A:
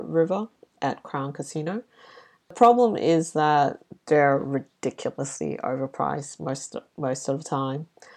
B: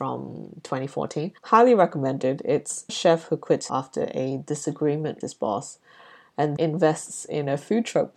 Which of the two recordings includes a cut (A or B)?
B